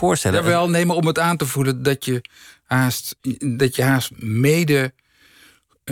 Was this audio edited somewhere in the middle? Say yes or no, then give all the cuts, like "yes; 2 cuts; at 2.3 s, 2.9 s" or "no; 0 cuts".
no; 0 cuts